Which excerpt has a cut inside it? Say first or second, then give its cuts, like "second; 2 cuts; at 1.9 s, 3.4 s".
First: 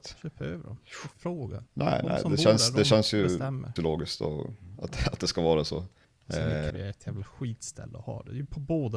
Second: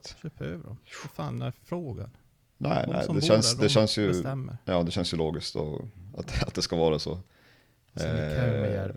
first; 5 cuts; at 1.1 s, 1.7 s, 3.8 s, 6.0 s, 6.7 s